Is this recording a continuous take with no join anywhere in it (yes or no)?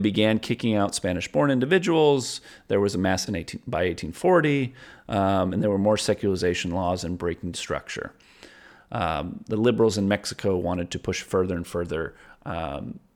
no